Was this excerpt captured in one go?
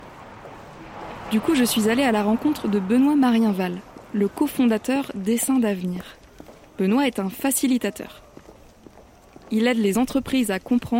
yes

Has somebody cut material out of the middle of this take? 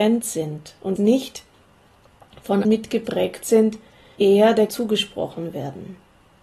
yes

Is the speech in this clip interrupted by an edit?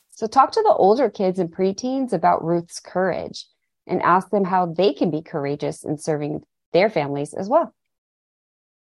no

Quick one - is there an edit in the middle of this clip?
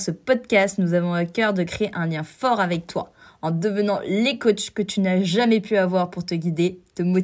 no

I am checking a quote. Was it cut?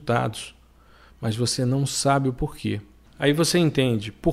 no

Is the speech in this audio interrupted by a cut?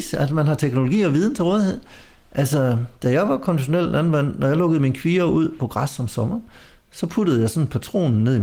no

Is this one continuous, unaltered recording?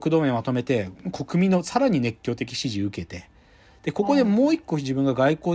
yes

